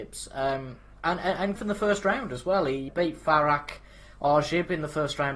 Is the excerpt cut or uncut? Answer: cut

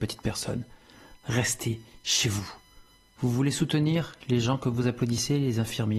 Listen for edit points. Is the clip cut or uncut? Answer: uncut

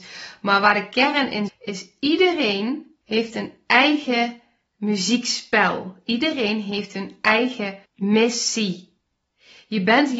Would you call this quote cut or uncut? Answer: cut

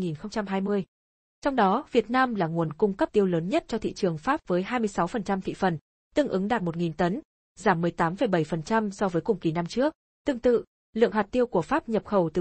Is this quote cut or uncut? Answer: cut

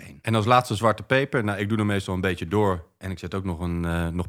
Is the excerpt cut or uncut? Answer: uncut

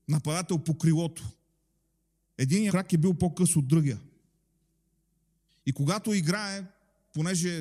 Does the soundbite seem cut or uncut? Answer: cut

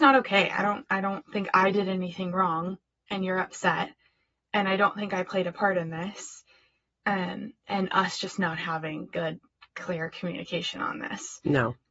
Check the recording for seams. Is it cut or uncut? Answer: uncut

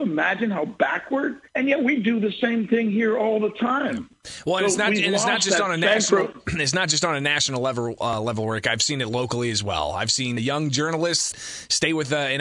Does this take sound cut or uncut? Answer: cut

